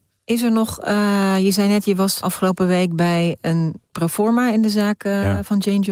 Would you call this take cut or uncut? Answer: cut